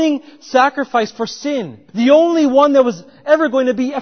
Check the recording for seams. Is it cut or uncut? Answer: cut